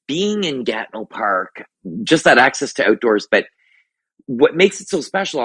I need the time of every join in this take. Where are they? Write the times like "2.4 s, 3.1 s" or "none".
none